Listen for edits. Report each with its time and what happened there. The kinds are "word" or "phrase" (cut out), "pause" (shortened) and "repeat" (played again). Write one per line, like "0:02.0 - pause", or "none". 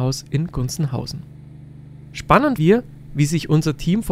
0:02.6 - word